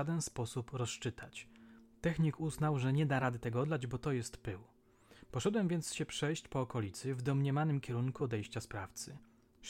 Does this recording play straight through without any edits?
yes; 0 cuts

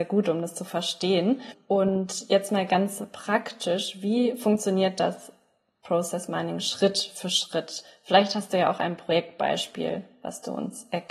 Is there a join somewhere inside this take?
no; 0 cuts

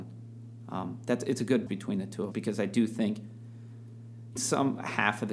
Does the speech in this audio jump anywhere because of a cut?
yes; 3 cuts; at 1.7 s, 2.3 s, 4.4 s

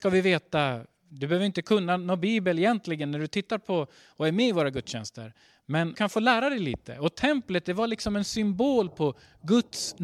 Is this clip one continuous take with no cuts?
no; 1 cut; at 5.9 s

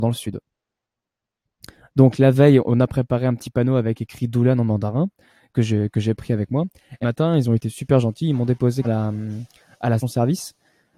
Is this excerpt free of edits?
no; 3 cuts; at 7.0 s, 8.8 s, 10.0 s

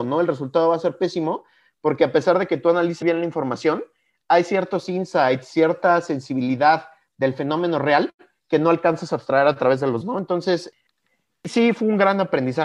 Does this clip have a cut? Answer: yes; 2 cuts; at 3.0 s, 10.0 s

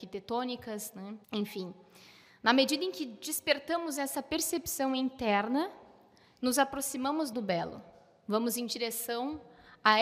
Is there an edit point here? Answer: yes; 2 cuts; at 1.2 s, 7.3 s

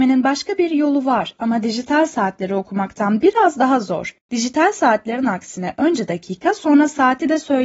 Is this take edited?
yes; 1 cut; at 4.2 s

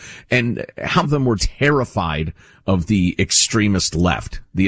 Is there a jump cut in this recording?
yes; 2 cuts; at 1.0 s, 1.4 s

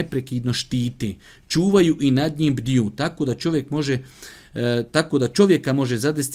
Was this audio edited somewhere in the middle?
no; 0 cuts

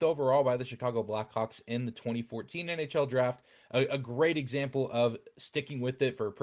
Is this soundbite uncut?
yes; 0 cuts

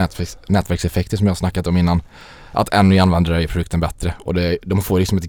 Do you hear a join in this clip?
no; 0 cuts

